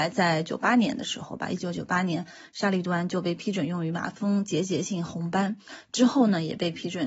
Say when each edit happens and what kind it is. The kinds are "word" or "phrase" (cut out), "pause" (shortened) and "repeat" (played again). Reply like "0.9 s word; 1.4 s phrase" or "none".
none